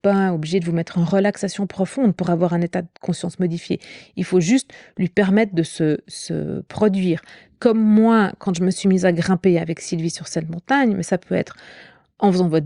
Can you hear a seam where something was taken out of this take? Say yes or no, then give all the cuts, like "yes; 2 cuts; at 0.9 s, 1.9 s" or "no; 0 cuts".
no; 0 cuts